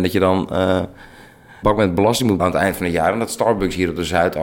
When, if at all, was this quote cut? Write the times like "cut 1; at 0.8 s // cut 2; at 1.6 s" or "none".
cut 1; at 1.6 s // cut 2; at 2.4 s

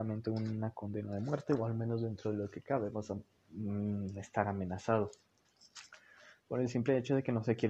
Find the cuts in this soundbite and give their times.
cut 1; at 3.4 s

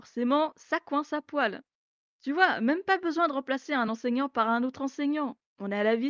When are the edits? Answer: none

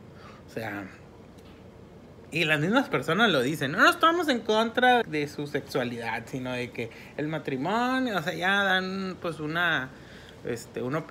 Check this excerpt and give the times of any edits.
cut 1; at 5.0 s

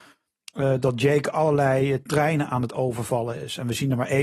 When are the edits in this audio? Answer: none

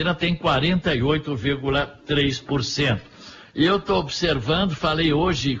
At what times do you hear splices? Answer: none

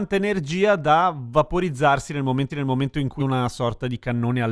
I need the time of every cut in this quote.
cut 1; at 2.5 s // cut 2; at 3.2 s

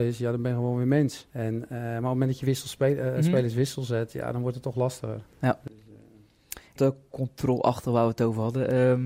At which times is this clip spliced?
cut 1; at 1.3 s // cut 2; at 5.3 s // cut 3; at 6.8 s

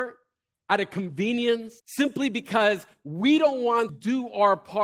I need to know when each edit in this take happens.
cut 1; at 1.8 s // cut 2; at 3.9 s

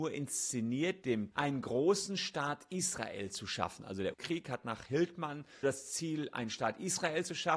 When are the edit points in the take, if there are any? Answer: cut 1; at 1.0 s // cut 2; at 1.3 s // cut 3; at 4.1 s // cut 4; at 5.6 s

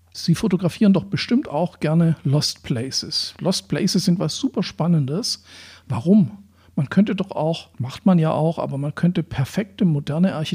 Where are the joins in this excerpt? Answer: cut 1; at 7.7 s

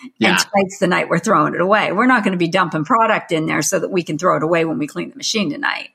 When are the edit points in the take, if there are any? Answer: none

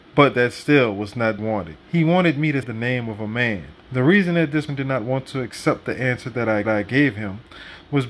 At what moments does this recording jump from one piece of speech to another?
cut 1; at 1.4 s // cut 2; at 1.8 s // cut 3; at 2.6 s // cut 4; at 3.8 s // cut 5; at 4.7 s // cut 6; at 6.6 s

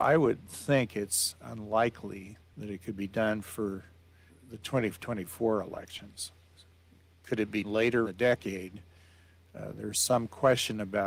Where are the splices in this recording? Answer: cut 1; at 2.4 s // cut 2; at 4.3 s // cut 3; at 7.6 s // cut 4; at 8.0 s

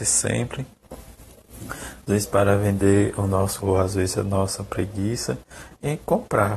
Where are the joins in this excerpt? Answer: cut 1; at 3.6 s

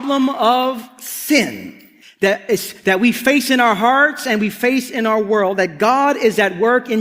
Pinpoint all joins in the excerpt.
cut 1; at 2.0 s

